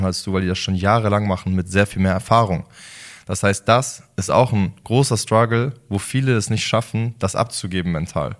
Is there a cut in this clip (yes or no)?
no